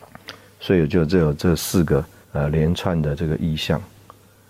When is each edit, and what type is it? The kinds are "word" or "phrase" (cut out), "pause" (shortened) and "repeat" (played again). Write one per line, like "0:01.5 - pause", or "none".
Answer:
0:02.2 - pause